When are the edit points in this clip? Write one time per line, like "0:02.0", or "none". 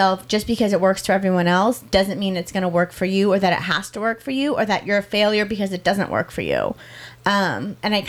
none